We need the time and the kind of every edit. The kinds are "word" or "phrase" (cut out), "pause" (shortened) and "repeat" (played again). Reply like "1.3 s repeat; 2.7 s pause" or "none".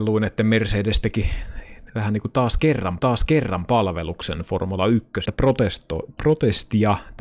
1.9 s pause; 3.0 s repeat; 5.3 s phrase